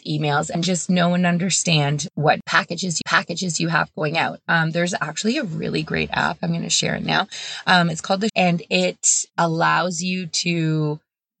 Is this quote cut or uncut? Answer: cut